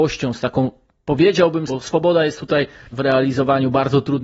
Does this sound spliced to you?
yes; 2 cuts; at 1.7 s, 2.9 s

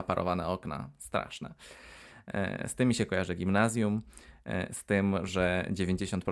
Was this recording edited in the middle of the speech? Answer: no; 0 cuts

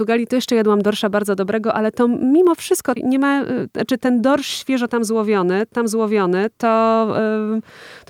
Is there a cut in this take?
yes; 3 cuts; at 3.0 s, 4.0 s, 5.7 s

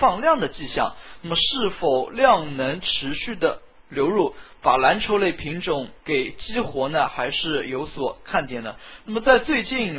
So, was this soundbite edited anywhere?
yes; 1 cut; at 6.0 s

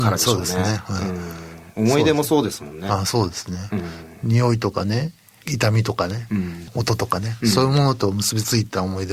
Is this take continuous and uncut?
yes; 0 cuts

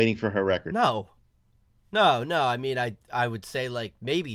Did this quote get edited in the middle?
no; 0 cuts

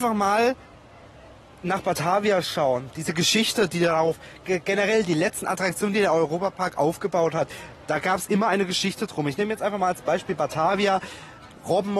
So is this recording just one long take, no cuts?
yes; 0 cuts

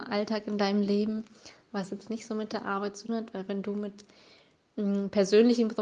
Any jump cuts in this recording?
yes; 1 cut; at 3.1 s

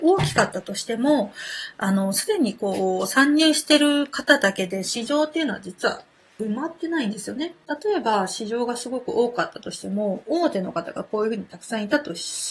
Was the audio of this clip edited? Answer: no; 0 cuts

